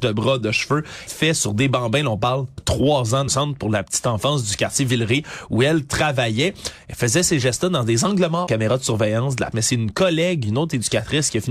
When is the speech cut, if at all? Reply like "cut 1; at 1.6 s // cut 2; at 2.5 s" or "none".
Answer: cut 1; at 1.1 s // cut 2; at 2.6 s // cut 3; at 3.3 s // cut 4; at 8.5 s // cut 5; at 9.5 s